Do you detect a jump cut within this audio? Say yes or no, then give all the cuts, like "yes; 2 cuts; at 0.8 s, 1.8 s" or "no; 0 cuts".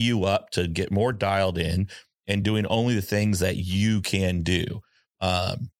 no; 0 cuts